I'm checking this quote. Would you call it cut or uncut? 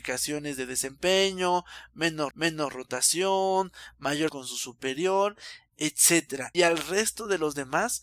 cut